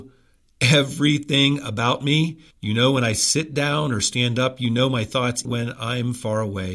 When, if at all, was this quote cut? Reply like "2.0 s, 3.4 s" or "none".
2.5 s, 5.4 s